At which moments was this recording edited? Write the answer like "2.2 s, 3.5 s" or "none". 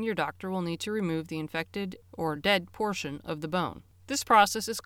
none